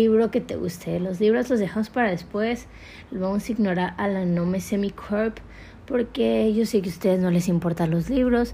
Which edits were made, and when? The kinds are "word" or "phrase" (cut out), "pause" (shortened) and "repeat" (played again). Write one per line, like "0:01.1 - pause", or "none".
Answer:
none